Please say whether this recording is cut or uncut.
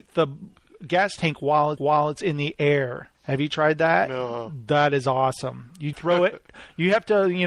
cut